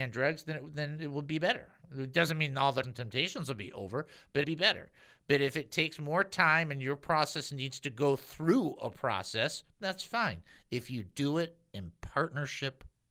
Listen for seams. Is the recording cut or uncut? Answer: cut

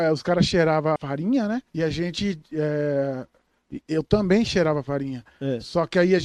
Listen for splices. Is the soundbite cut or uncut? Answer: cut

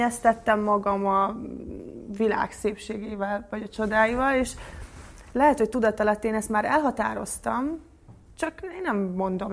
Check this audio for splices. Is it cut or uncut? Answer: uncut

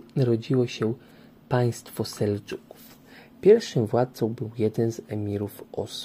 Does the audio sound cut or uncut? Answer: uncut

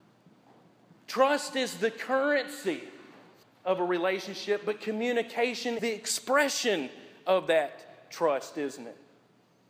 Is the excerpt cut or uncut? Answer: cut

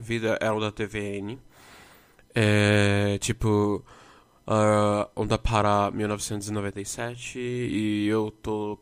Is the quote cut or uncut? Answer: uncut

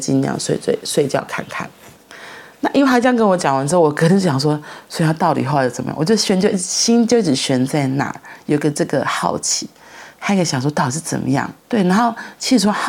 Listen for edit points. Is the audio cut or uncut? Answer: cut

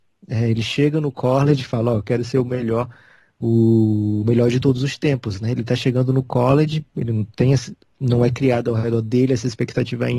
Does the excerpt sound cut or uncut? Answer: uncut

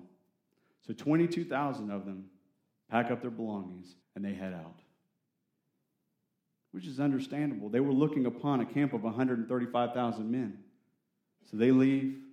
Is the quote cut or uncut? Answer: cut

